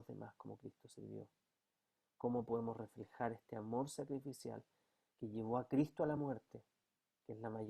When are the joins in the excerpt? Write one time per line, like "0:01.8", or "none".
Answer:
none